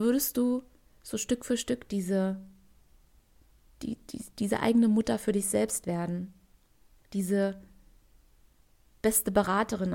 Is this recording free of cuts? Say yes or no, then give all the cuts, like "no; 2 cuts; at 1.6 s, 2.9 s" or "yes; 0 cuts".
yes; 0 cuts